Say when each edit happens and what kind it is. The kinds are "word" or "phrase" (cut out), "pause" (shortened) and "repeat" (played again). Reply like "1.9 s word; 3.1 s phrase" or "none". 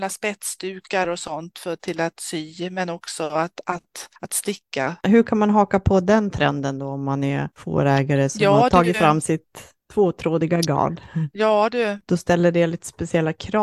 4.2 s pause; 9.8 s pause